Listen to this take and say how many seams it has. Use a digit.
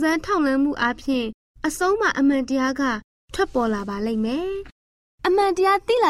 0